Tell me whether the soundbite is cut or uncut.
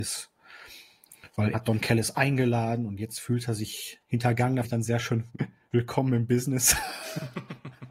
cut